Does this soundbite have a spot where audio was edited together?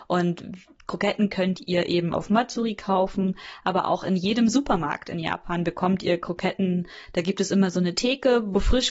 no; 0 cuts

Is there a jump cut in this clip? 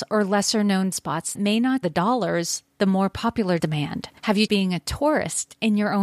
yes; 6 cuts; at 0.9 s, 1.3 s, 1.8 s, 3.6 s, 4.2 s, 4.5 s

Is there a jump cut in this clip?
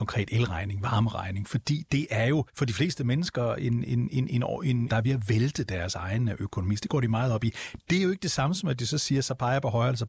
yes; 2 cuts; at 2.5 s, 4.9 s

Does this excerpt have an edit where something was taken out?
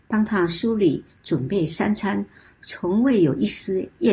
no; 0 cuts

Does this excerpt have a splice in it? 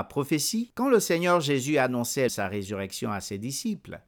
yes; 1 cut; at 2.3 s

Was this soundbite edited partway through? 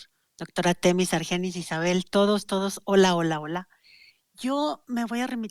no; 0 cuts

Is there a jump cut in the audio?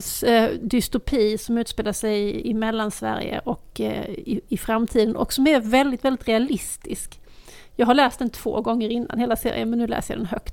no; 0 cuts

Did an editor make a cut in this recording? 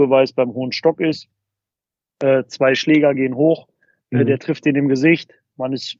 no; 0 cuts

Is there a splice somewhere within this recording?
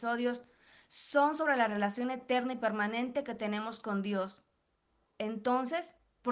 no; 0 cuts

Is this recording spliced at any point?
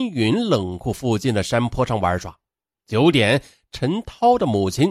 no; 0 cuts

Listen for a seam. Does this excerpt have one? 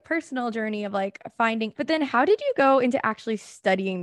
yes; 1 cut; at 1.7 s

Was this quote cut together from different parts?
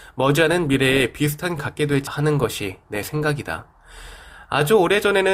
yes; 2 cuts; at 1.6 s, 2.1 s

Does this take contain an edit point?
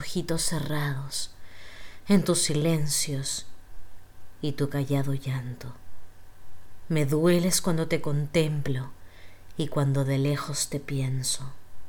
no; 0 cuts

